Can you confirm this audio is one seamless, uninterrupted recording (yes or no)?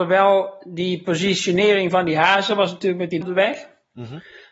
no